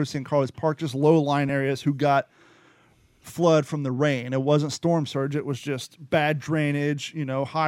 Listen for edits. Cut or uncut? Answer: uncut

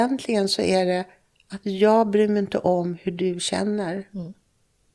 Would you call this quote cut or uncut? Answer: uncut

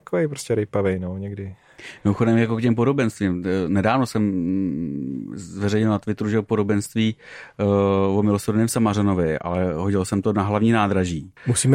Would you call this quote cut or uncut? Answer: uncut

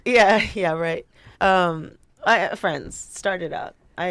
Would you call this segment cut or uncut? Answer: cut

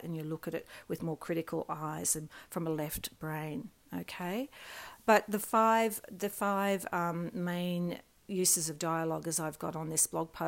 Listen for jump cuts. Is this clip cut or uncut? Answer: uncut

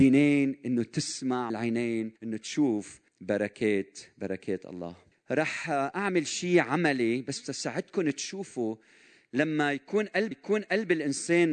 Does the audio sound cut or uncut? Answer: cut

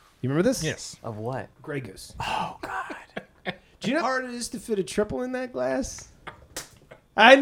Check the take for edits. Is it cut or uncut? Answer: cut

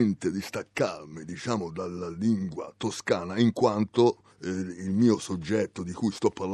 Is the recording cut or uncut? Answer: cut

